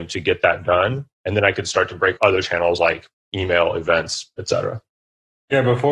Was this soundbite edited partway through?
yes; 1 cut; at 2.2 s

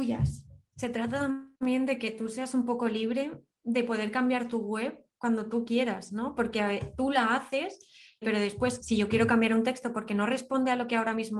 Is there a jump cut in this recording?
yes; 3 cuts; at 1.5 s, 8.2 s, 8.8 s

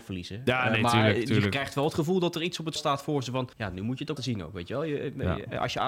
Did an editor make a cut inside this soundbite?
yes; 3 cuts; at 2.8 s, 3.5 s, 4.2 s

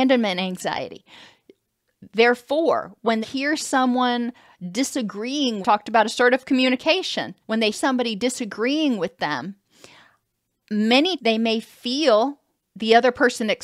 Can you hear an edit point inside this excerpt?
yes; 6 cuts; at 3.2 s, 5.6 s, 7.4 s, 7.7 s, 11.2 s, 12.6 s

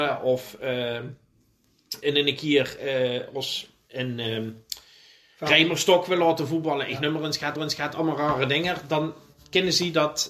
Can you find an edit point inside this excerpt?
yes; 2 cuts; at 2.0 s, 7.6 s

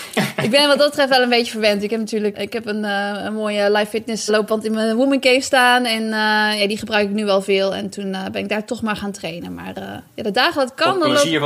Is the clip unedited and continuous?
no; 2 cuts; at 2.3 s, 4.3 s

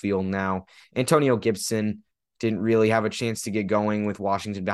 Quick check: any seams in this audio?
no; 0 cuts

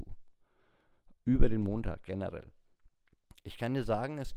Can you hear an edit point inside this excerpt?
yes; 1 cut; at 1.2 s

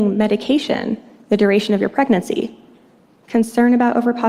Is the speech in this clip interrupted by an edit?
no; 0 cuts

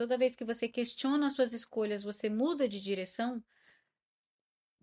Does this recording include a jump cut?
no; 0 cuts

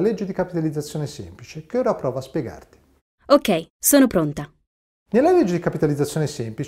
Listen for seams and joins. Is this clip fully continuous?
yes; 0 cuts

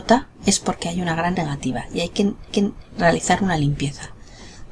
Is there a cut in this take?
yes; 2 cuts; at 1.4 s, 2.5 s

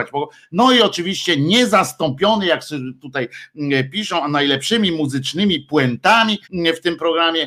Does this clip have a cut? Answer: yes; 1 cut; at 6.4 s

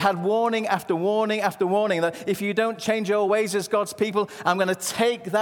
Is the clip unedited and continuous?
yes; 0 cuts

